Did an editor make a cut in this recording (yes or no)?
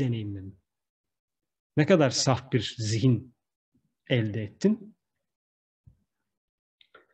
no